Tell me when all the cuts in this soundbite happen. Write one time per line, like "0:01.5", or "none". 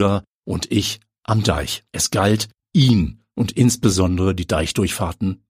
0:01.9